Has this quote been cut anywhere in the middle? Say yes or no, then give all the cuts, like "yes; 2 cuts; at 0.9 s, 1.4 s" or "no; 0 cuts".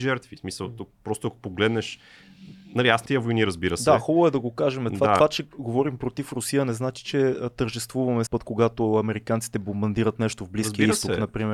yes; 2 cuts; at 3.1 s, 8.3 s